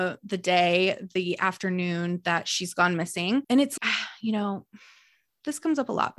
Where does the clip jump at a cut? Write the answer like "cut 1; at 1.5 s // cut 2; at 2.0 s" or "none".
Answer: none